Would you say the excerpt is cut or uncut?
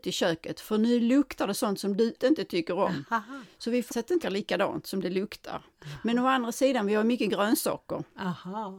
cut